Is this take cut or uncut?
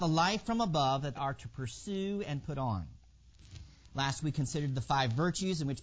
cut